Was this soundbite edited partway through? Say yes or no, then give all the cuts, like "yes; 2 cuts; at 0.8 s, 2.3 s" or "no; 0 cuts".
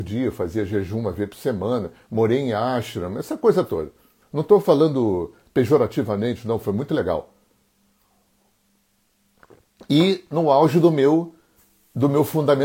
no; 0 cuts